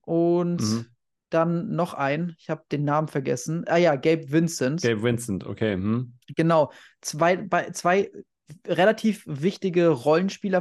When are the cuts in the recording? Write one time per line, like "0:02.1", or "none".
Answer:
none